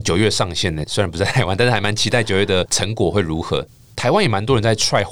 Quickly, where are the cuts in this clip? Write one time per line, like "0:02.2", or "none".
none